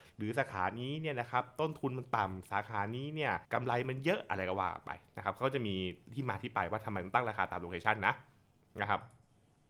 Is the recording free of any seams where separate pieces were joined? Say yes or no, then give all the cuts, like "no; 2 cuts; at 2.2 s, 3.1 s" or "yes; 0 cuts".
no; 1 cut; at 3.4 s